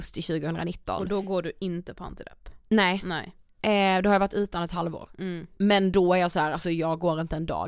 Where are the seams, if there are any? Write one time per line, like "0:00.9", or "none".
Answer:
none